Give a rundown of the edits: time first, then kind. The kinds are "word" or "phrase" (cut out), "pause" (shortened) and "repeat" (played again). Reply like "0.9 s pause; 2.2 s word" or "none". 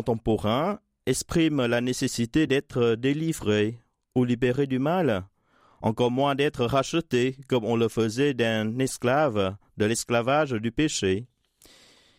none